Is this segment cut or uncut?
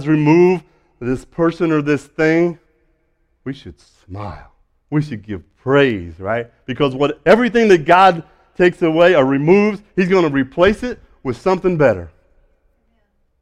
uncut